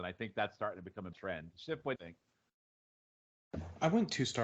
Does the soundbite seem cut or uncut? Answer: cut